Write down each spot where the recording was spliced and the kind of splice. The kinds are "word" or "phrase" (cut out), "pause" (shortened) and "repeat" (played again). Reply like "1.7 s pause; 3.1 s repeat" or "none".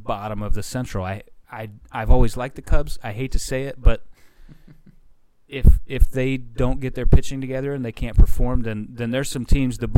1.4 s pause